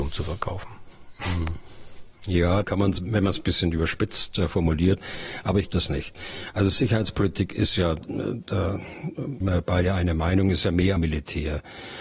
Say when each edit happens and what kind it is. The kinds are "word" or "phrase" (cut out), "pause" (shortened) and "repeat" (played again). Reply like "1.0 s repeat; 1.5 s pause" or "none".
2.6 s word; 3.0 s word; 5.7 s word; 9.4 s word; 11.0 s phrase